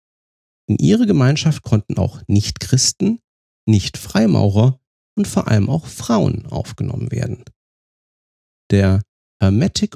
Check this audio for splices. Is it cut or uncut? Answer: uncut